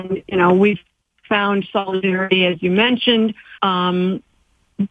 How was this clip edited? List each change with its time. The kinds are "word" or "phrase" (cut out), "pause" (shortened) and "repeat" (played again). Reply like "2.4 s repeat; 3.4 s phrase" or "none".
3.6 s pause